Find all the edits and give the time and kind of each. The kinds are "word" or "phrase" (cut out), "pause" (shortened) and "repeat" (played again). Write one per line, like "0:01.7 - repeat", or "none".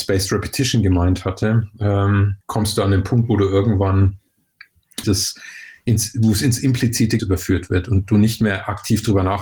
0:02.4 - pause
0:05.0 - word
0:07.2 - word

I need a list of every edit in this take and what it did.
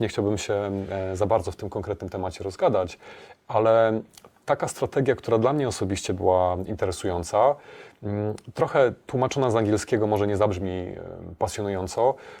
none

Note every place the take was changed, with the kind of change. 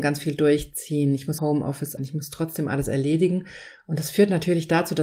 0:01.4 - word
0:02.0 - word

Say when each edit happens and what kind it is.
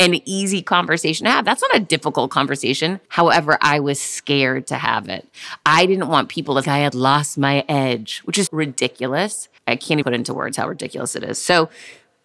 0:03.1 - pause
0:06.6 - word
0:08.5 - word
0:09.6 - pause
0:10.0 - word

